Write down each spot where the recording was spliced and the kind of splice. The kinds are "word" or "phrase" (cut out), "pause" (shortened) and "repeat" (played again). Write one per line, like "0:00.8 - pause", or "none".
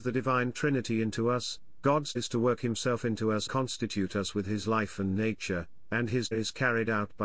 0:02.2 - word
0:03.5 - word
0:06.3 - word